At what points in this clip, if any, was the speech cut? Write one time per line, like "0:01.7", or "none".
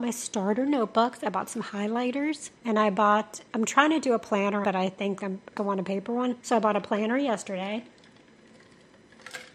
0:02.6
0:03.5
0:04.6
0:05.2
0:05.6
0:06.4